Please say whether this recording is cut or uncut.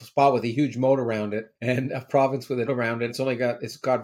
cut